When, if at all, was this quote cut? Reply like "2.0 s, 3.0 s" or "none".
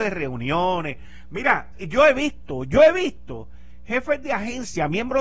none